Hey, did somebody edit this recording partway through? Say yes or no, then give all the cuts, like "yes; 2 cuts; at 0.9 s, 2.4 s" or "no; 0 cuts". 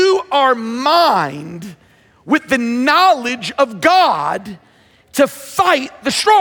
no; 0 cuts